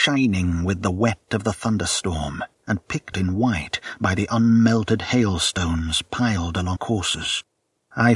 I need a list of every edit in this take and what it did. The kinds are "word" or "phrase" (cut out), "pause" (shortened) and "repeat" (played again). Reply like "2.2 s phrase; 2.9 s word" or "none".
3.1 s word; 6.8 s word